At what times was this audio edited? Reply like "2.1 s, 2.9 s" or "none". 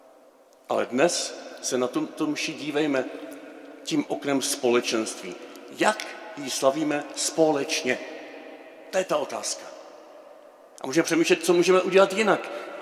none